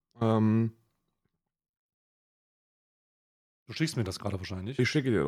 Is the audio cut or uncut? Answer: uncut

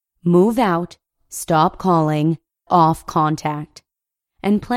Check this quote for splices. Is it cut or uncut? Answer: cut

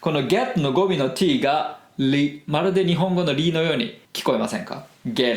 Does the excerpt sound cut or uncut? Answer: cut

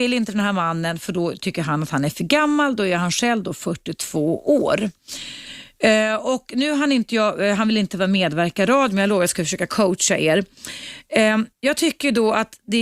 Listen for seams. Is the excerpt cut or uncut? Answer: cut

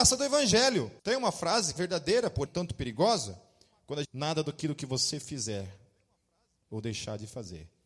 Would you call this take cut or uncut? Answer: cut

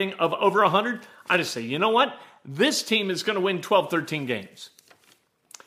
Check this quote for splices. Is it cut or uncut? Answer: uncut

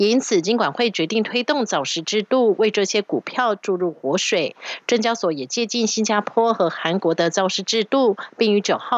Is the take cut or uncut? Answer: uncut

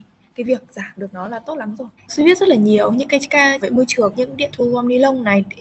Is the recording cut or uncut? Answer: cut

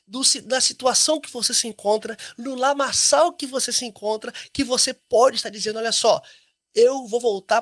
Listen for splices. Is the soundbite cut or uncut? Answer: uncut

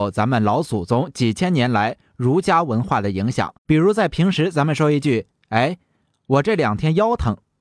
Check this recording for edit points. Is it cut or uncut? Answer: cut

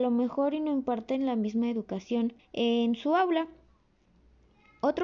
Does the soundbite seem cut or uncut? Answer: cut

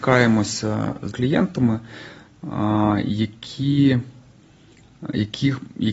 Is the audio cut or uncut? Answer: cut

